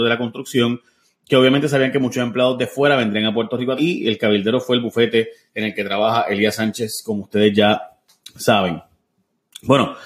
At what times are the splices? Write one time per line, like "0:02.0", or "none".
0:03.8

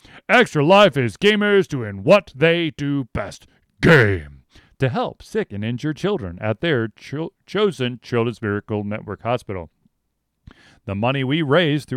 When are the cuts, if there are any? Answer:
none

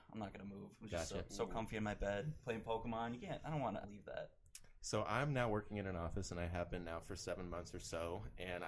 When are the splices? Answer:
0:03.8

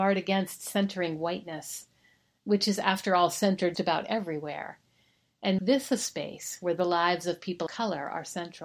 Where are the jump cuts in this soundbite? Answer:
0:03.7
0:05.6
0:07.7

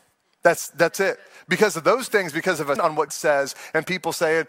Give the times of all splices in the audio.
0:02.1
0:02.8
0:03.1

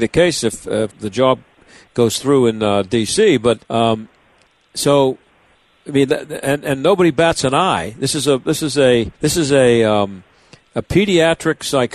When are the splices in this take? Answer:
0:00.9
0:03.6
0:09.1

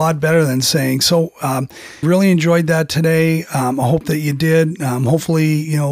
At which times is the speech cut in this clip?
0:02.0

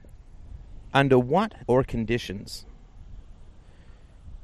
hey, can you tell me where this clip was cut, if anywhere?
0:01.6

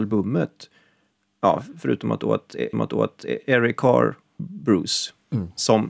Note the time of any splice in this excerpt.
0:02.7
0:04.4

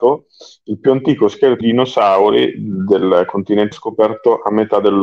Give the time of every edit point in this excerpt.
0:01.6
0:03.7

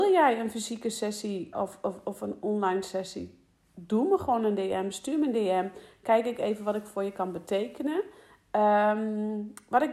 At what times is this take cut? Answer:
0:01.5

